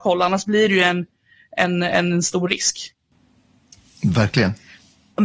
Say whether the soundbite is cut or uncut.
uncut